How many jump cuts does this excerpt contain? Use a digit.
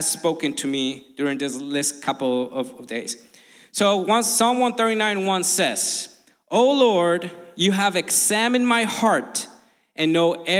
0